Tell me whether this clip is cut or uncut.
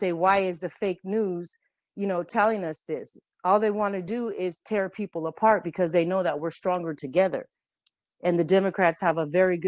uncut